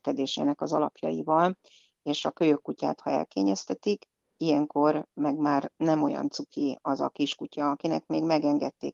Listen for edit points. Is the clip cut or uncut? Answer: uncut